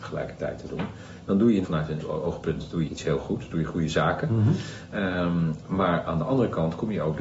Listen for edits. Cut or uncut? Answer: cut